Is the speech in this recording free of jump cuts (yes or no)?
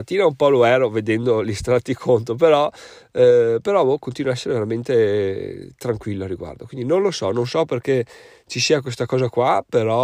yes